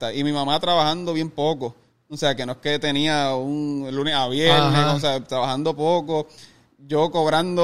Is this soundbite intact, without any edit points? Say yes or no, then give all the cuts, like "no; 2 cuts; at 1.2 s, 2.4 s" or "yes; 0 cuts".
yes; 0 cuts